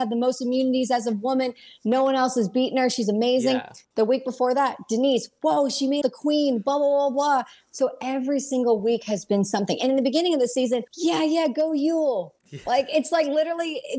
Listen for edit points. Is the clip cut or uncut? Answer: cut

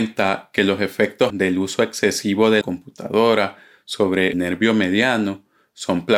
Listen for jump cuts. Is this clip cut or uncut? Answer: cut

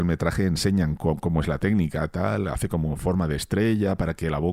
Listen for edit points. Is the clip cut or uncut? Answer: uncut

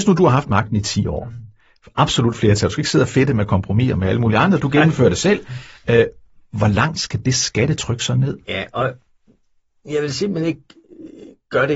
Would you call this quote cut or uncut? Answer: uncut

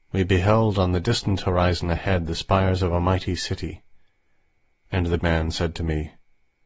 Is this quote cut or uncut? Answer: cut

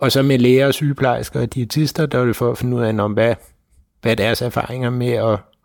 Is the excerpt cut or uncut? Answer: uncut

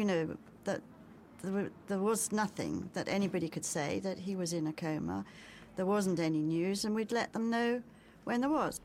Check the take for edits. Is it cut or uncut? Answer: uncut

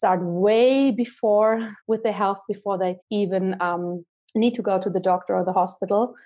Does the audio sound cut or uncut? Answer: cut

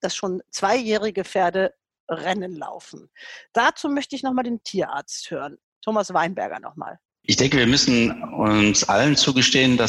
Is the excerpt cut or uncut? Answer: uncut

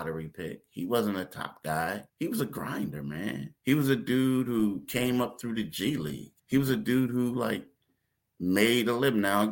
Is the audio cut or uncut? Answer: cut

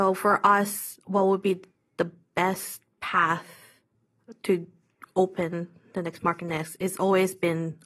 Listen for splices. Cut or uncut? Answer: uncut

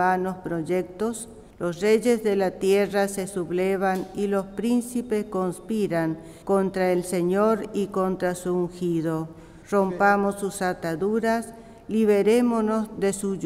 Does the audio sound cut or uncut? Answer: cut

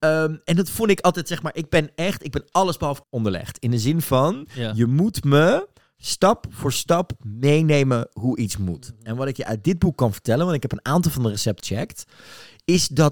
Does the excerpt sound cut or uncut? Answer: cut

